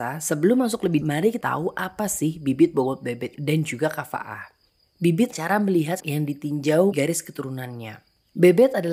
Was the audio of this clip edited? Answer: yes; 6 cuts; at 1.0 s, 1.4 s, 3.3 s, 5.3 s, 6.0 s, 6.9 s

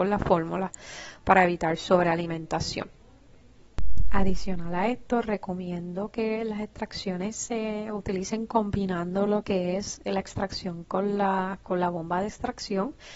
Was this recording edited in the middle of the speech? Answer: no; 0 cuts

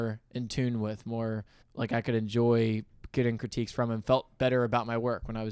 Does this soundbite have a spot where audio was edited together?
yes; 1 cut; at 1.6 s

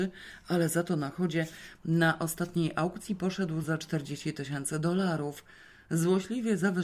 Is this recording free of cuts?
yes; 0 cuts

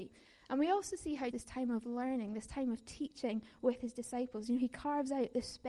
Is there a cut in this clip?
yes; 1 cut; at 1.3 s

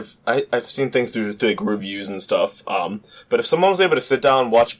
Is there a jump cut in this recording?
no; 0 cuts

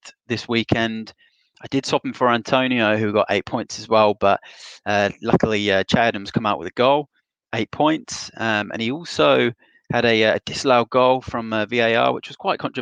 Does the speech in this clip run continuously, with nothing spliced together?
yes; 0 cuts

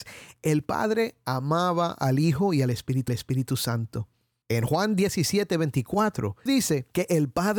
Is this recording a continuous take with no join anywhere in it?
no; 2 cuts; at 3.1 s, 6.5 s

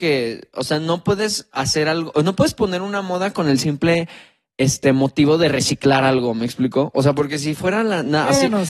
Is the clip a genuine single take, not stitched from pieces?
yes; 0 cuts

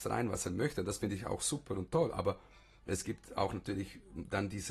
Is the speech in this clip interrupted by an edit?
no; 0 cuts

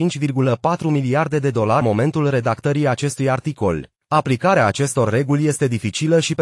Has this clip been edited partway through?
yes; 2 cuts; at 1.8 s, 4.0 s

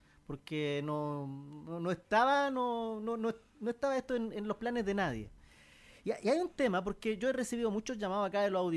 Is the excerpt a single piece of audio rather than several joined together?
yes; 0 cuts

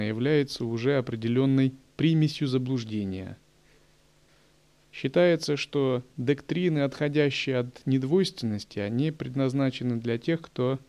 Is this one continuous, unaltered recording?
yes; 0 cuts

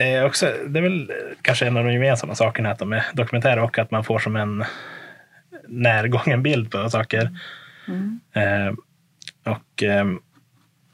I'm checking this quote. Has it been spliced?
no; 0 cuts

